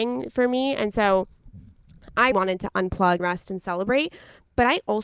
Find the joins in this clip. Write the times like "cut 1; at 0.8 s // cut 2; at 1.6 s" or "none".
cut 1; at 2.3 s // cut 2; at 3.2 s